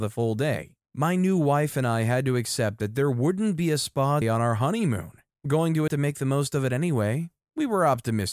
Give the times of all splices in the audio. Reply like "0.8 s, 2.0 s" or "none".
4.2 s, 5.5 s, 5.9 s